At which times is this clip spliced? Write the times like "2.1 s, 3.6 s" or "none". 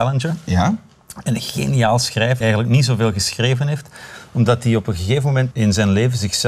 2.4 s, 5.5 s